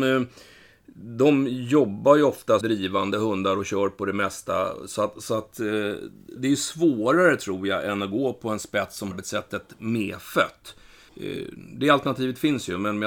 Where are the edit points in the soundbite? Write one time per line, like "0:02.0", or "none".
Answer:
0:02.6
0:06.4
0:09.1